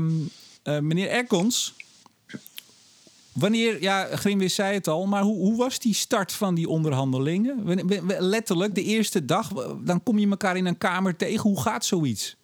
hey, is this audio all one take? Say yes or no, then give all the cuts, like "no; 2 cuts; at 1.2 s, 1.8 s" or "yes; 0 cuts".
yes; 0 cuts